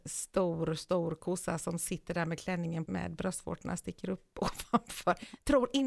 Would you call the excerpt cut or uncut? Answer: cut